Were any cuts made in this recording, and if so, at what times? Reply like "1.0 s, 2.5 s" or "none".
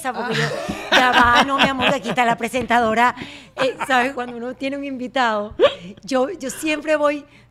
4.1 s